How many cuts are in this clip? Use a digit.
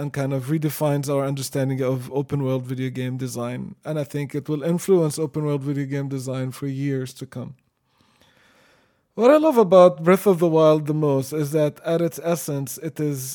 0